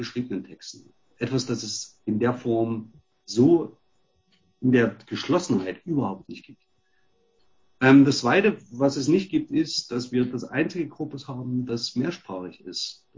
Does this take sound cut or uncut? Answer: uncut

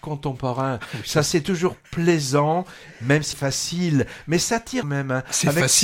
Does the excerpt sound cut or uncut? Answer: cut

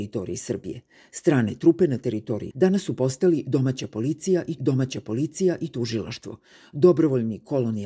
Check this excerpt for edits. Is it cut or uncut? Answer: cut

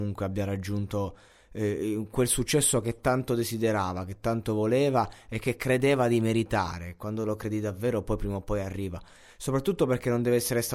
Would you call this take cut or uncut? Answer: uncut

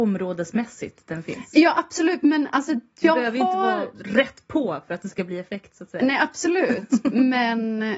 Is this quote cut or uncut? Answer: uncut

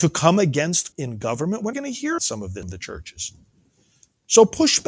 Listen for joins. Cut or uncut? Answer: cut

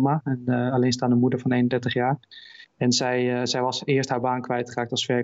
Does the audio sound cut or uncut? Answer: uncut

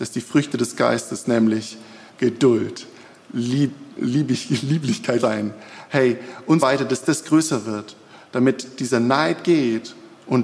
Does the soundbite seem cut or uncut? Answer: cut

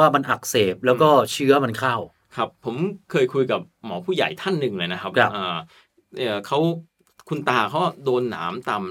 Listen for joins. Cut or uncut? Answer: uncut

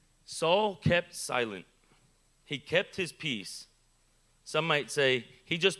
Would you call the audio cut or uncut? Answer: uncut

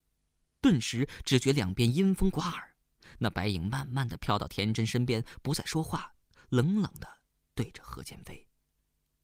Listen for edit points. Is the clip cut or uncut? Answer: uncut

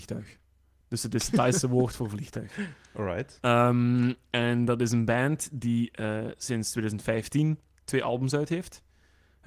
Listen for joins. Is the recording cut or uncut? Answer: uncut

